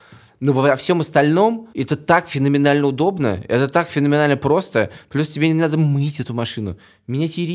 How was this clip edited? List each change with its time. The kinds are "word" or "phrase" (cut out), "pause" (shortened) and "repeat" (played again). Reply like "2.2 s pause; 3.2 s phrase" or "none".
1.7 s pause